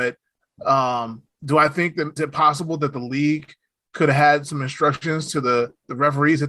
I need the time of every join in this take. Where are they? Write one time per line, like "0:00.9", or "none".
0:02.2